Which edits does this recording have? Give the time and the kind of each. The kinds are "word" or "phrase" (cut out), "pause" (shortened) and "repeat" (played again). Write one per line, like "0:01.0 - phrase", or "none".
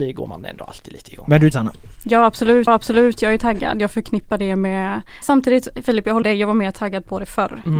0:01.5 - word
0:02.7 - repeat
0:05.2 - word
0:06.2 - word

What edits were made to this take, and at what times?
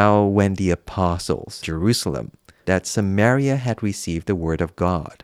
0:01.6 - word
0:02.6 - word

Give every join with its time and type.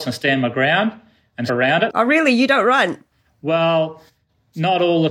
0:01.5 - word

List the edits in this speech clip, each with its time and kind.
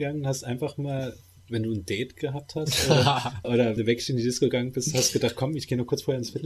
0:03.4 - word
0:03.8 - word

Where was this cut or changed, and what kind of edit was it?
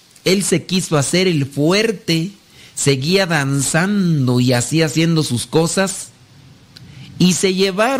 none

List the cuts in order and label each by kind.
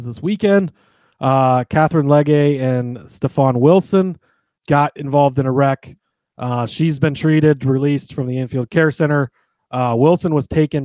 0:04.6 - word

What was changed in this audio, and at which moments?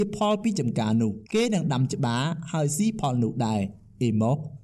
0:01.3 - pause

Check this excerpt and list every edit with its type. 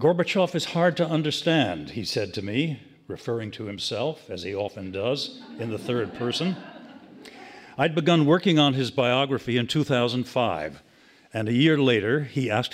none

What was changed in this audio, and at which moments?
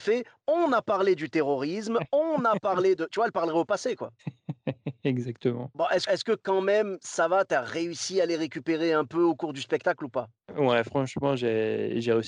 0:06.1 - word

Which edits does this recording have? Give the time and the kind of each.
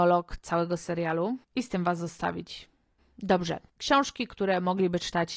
0:01.4 - pause
0:03.7 - pause

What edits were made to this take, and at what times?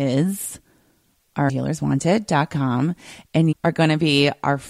0:01.5 - phrase
0:03.5 - word

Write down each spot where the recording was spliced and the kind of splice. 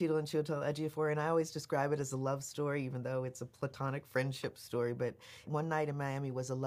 none

